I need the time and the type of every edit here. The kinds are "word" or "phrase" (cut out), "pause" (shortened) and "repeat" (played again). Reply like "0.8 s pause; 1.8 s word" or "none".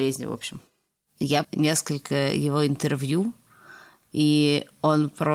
1.4 s word